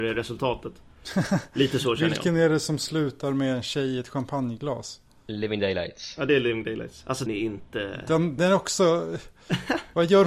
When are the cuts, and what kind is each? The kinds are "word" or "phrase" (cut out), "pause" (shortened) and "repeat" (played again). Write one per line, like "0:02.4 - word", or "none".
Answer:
0:07.3 - word
0:08.4 - word